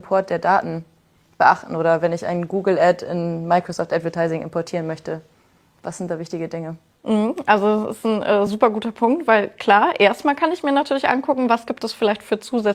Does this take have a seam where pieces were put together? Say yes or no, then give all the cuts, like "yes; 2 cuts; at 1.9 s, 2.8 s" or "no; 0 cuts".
no; 0 cuts